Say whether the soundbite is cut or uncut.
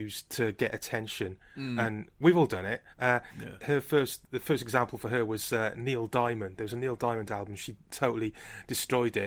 cut